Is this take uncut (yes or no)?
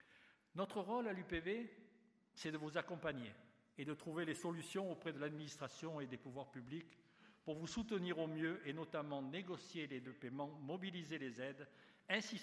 no